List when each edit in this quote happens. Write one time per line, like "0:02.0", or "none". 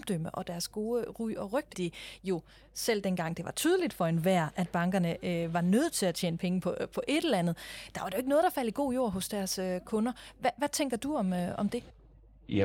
0:01.7